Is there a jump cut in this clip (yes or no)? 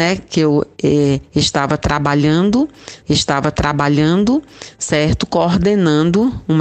yes